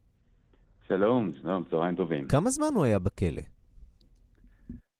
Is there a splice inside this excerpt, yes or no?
no